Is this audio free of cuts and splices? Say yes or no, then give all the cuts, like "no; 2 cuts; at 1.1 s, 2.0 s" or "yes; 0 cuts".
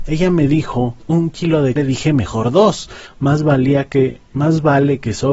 no; 2 cuts; at 1.0 s, 1.8 s